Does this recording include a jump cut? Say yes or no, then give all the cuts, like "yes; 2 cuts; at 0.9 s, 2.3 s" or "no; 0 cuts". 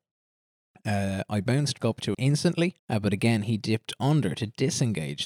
yes; 3 cuts; at 1.8 s, 2.1 s, 2.8 s